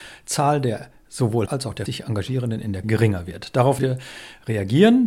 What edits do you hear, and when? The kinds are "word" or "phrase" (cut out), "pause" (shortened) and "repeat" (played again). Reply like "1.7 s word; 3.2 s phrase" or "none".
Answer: 1.5 s word; 1.9 s word; 2.8 s word; 3.8 s word